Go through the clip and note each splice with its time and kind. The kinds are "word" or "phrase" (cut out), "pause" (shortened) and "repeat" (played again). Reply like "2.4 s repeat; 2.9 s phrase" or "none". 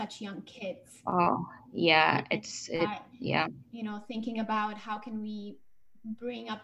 3.7 s pause